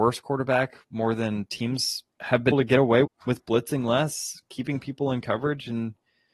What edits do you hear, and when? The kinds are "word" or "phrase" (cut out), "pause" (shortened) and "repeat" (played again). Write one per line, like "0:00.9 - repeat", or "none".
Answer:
0:02.1 - pause
0:02.5 - word
0:03.0 - word